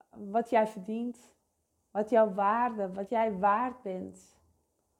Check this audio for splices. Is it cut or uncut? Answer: uncut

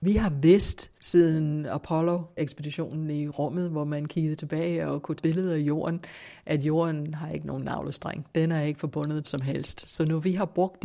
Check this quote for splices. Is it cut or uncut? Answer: cut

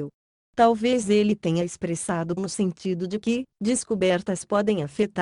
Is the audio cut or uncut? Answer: cut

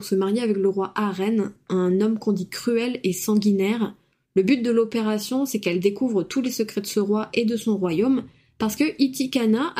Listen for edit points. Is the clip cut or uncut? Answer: uncut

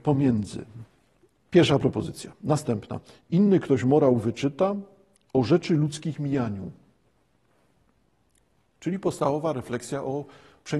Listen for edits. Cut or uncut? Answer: uncut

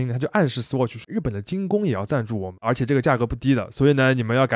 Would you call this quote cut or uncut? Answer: cut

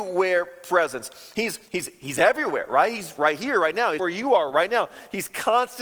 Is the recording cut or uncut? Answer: cut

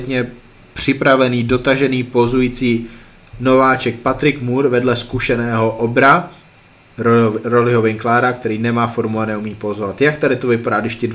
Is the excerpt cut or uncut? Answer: uncut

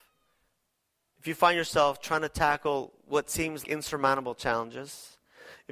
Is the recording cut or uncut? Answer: cut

